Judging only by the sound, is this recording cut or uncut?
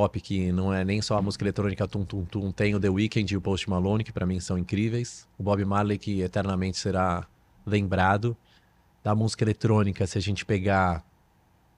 cut